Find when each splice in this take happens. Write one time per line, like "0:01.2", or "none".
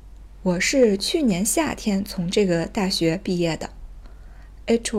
none